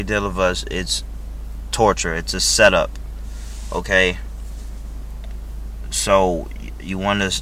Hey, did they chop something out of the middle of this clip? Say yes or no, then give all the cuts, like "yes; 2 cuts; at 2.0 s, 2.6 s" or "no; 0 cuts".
no; 0 cuts